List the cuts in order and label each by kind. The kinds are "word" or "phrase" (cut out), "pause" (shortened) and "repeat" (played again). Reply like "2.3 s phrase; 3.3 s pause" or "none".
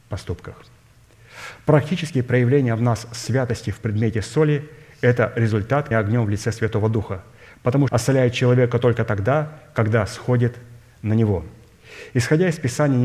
5.9 s word; 7.9 s phrase